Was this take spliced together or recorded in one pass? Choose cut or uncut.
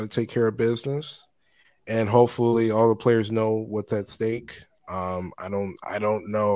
uncut